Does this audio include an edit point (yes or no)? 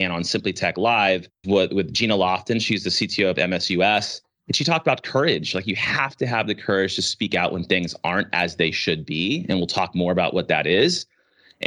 yes